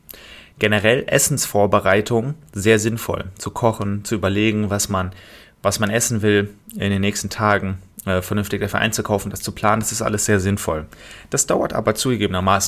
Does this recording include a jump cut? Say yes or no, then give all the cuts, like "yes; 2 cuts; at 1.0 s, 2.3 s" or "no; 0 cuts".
no; 0 cuts